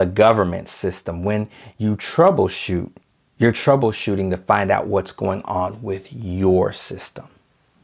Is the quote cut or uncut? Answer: cut